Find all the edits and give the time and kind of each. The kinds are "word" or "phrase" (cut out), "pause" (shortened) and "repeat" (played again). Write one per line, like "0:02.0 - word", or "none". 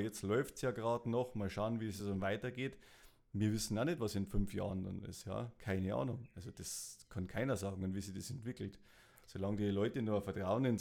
none

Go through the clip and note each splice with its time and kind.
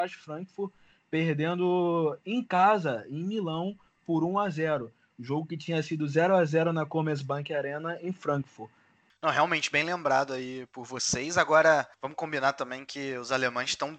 none

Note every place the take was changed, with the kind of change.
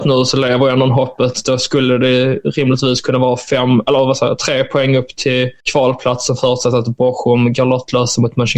0:05.6 - pause

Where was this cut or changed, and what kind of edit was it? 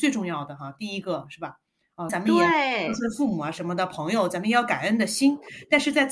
0:02.1 - phrase

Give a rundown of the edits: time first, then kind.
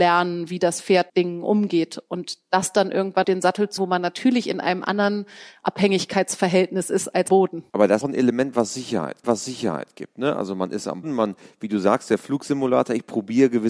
0:01.1 - word
0:03.2 - word
0:03.8 - word
0:07.3 - word
0:07.7 - pause
0:08.0 - phrase
0:09.2 - repeat
0:11.0 - word

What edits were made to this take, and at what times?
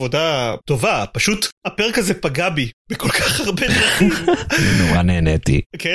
0:02.8 - pause

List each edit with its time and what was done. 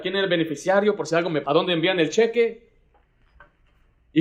0:01.4 - word

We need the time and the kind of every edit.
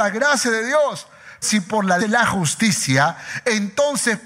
0:01.4 - word
0:02.0 - phrase

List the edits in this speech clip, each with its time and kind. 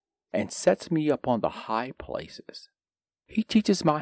none

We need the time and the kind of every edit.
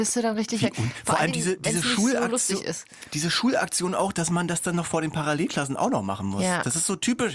none

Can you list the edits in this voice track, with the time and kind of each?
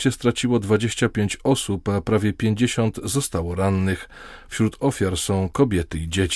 none

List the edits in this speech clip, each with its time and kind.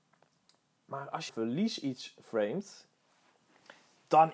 0:01.3 - phrase

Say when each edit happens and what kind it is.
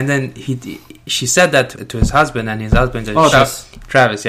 0:01.7 - word
0:03.3 - word

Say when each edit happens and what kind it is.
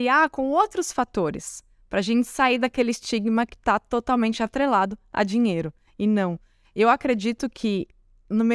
none

